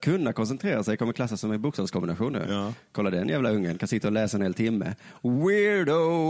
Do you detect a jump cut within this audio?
no; 0 cuts

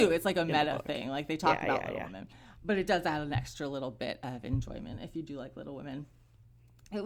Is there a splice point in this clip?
no; 0 cuts

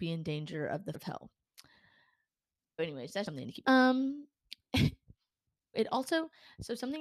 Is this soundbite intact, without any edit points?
no; 5 cuts; at 0.9 s, 2.8 s, 3.3 s, 3.6 s, 5.7 s

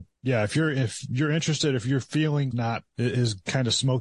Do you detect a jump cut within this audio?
yes; 2 cuts; at 2.5 s, 2.9 s

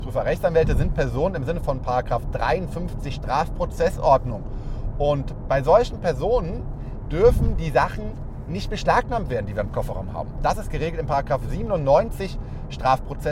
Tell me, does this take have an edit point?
no; 0 cuts

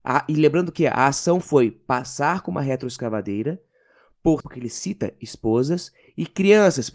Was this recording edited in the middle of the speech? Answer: yes; 1 cut; at 4.4 s

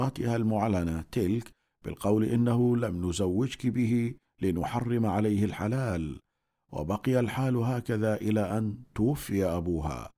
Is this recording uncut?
yes; 0 cuts

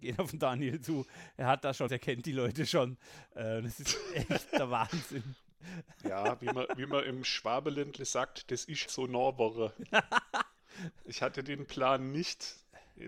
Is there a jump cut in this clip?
yes; 2 cuts; at 1.9 s, 8.9 s

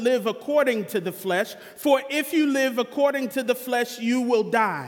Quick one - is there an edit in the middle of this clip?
no; 0 cuts

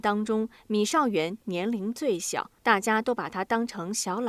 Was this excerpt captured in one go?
no; 1 cut; at 2.6 s

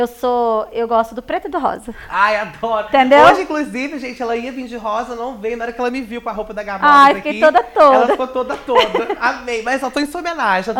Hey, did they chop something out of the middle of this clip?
no; 0 cuts

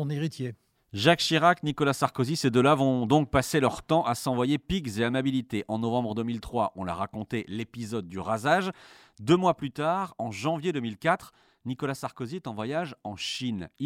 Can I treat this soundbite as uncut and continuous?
yes; 0 cuts

